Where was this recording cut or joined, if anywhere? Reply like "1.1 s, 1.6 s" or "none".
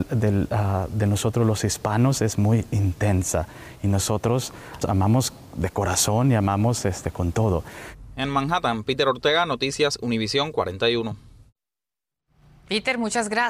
4.8 s